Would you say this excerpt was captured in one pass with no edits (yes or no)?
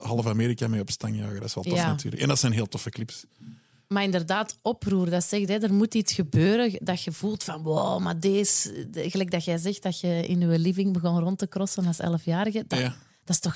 yes